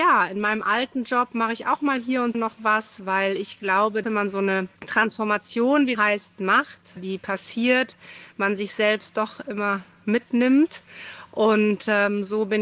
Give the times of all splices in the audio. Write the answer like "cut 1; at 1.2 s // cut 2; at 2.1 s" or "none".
cut 1; at 2.3 s // cut 2; at 4.0 s // cut 3; at 4.8 s // cut 4; at 5.9 s // cut 5; at 7.0 s